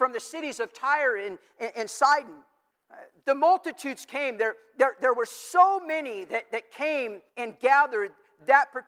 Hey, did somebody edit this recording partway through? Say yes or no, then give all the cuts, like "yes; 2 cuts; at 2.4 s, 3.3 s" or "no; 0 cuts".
yes; 2 cuts; at 2.7 s, 7.3 s